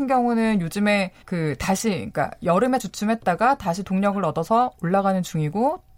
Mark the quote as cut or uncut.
cut